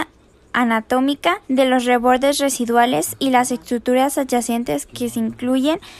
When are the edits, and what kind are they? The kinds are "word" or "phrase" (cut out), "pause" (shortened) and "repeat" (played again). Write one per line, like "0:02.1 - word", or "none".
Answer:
0:01.4 - pause